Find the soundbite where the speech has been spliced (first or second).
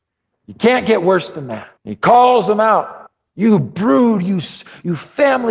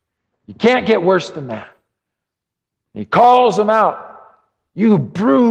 first